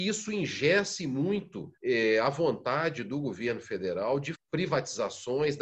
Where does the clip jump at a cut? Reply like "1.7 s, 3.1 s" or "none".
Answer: 1.8 s, 4.3 s

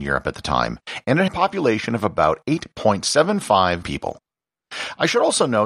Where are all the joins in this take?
1.3 s, 3.8 s

